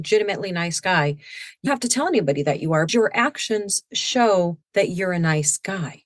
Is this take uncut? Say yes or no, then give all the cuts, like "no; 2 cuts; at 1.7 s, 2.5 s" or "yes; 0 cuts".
no; 3 cuts; at 1.7 s, 2.9 s, 4.6 s